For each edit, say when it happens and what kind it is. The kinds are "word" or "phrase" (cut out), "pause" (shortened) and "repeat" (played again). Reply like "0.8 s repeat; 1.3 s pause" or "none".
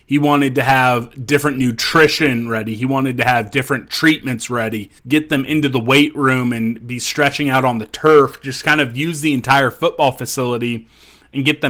5.0 s pause